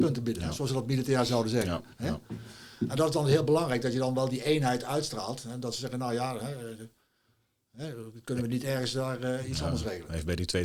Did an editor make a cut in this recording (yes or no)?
no